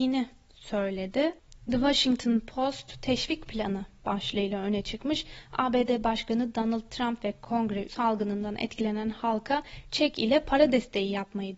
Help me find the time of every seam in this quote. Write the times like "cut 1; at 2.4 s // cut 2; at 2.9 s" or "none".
cut 1; at 7.9 s